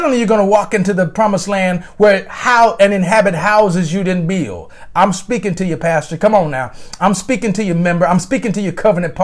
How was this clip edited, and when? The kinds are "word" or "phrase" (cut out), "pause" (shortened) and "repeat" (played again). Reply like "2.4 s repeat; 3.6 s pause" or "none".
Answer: none